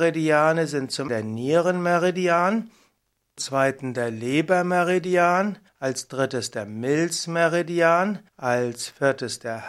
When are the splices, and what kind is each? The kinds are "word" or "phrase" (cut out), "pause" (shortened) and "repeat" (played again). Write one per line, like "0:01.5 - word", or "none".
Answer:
0:01.1 - word
0:03.4 - word
0:05.7 - pause
0:08.3 - pause